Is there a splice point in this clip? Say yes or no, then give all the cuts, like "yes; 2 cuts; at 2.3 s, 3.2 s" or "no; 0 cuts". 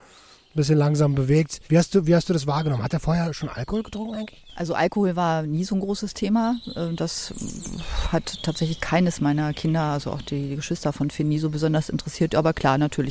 yes; 1 cut; at 1.6 s